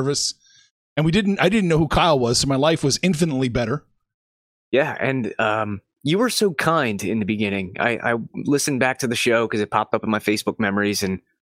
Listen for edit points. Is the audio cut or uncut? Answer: uncut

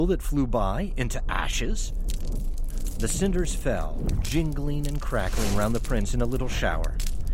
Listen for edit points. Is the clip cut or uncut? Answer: uncut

